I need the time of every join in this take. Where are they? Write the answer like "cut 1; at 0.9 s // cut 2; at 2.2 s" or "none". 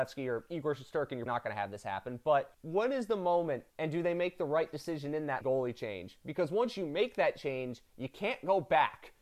cut 1; at 1.3 s // cut 2; at 2.5 s // cut 3; at 3.7 s // cut 4; at 5.4 s